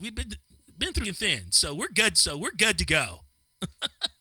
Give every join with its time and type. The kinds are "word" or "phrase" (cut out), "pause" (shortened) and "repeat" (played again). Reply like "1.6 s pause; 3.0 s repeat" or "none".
1.0 s word; 2.1 s repeat